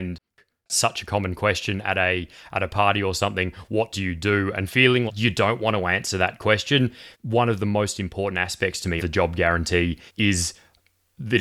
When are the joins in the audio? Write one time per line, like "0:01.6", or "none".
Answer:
0:05.1
0:07.1
0:09.0
0:10.1